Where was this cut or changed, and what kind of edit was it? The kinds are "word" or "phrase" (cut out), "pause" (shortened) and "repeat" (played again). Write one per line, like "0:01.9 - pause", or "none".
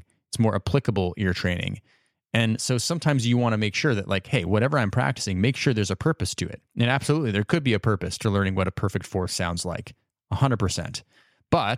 none